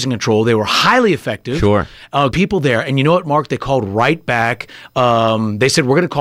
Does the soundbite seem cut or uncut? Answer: cut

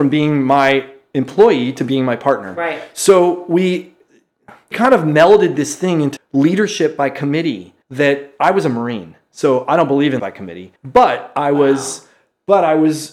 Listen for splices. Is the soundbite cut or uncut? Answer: cut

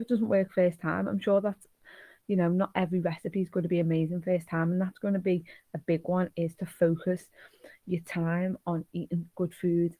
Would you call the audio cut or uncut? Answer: uncut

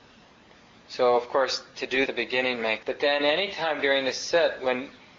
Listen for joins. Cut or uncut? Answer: cut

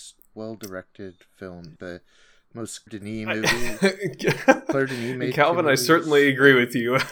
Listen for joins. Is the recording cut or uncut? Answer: cut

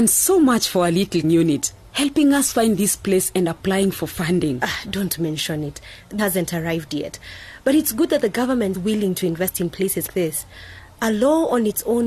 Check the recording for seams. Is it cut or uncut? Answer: cut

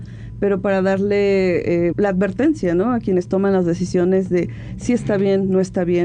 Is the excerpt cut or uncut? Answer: cut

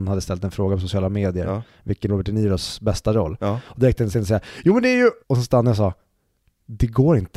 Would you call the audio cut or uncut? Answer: cut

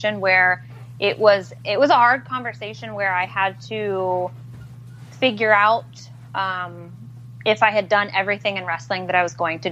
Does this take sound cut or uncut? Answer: uncut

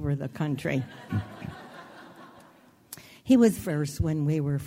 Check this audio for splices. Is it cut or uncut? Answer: cut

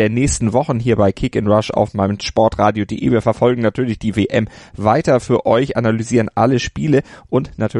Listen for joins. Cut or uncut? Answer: uncut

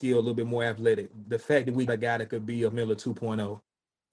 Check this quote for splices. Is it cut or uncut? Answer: cut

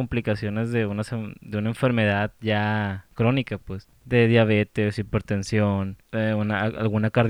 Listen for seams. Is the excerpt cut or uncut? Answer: cut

